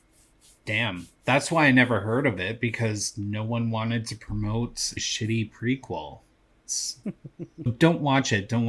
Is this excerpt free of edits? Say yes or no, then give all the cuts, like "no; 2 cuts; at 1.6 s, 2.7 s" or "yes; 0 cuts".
no; 2 cuts; at 5.0 s, 7.7 s